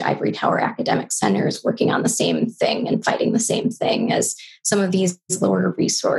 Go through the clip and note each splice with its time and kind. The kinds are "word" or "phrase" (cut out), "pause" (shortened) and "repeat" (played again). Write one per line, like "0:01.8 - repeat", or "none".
none